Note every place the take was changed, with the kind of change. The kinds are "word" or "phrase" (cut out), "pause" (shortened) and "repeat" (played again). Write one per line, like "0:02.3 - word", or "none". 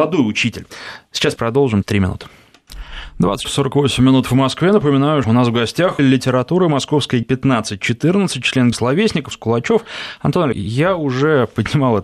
0:01.4 - word
0:01.8 - word
0:03.4 - word
0:05.2 - word
0:06.0 - word
0:07.2 - word
0:08.7 - word
0:09.3 - word
0:10.5 - word